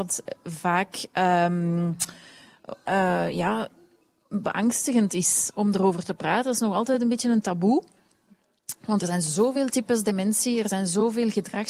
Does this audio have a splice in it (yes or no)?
no